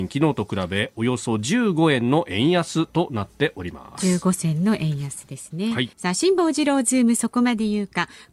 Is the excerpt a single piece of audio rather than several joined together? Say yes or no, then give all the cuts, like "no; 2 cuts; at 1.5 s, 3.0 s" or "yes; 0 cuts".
no; 1 cut; at 5.9 s